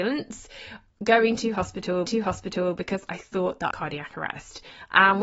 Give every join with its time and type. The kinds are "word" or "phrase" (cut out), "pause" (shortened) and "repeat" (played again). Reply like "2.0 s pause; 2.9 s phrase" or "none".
2.1 s repeat; 3.7 s phrase